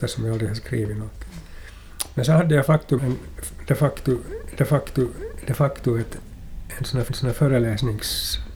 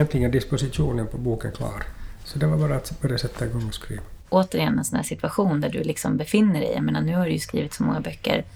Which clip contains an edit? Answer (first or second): first